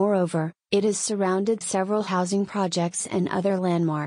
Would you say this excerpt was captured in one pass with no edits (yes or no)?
no